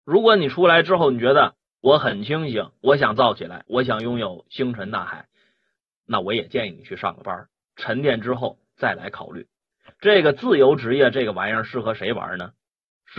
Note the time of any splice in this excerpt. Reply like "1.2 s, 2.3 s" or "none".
none